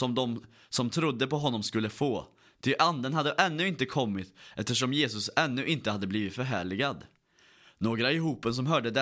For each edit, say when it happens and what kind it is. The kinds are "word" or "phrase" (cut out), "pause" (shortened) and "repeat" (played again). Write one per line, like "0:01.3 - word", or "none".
none